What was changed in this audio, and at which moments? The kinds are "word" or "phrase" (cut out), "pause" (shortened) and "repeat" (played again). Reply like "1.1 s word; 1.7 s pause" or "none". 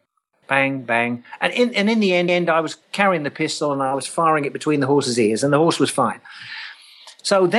2.3 s repeat